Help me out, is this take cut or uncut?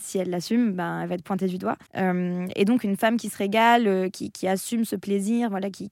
cut